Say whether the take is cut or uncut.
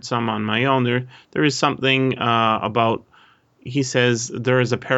uncut